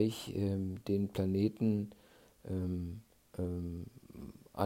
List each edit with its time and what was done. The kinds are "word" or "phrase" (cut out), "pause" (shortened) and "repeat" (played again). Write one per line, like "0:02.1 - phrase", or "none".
none